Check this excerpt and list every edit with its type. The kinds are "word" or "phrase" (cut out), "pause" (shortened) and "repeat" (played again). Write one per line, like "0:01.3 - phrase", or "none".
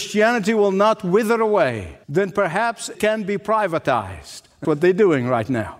0:02.0 - pause
0:02.9 - word
0:04.6 - word